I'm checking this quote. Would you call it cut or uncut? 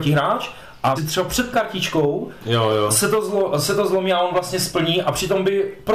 cut